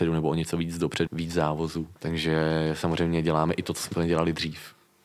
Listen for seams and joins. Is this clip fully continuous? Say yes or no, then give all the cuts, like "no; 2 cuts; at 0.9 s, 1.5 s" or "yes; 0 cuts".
no; 2 cuts; at 1.1 s, 2.0 s